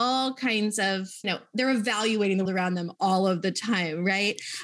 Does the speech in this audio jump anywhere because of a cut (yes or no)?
yes